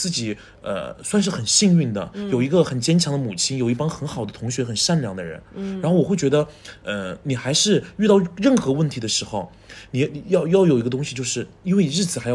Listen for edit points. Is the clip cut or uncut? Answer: uncut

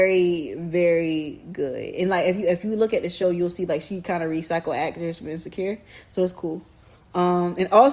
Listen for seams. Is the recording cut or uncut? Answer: uncut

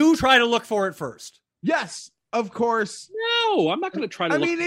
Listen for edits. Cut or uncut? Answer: cut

